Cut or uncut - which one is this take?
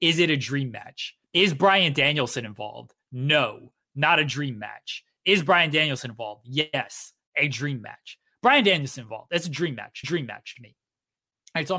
cut